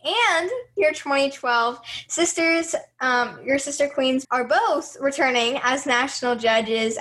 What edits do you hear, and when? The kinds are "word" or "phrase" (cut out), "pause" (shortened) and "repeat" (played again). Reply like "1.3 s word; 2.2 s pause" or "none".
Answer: 4.2 s phrase